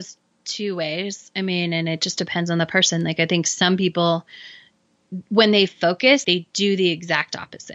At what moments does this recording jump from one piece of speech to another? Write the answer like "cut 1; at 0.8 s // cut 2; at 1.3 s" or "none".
cut 1; at 6.2 s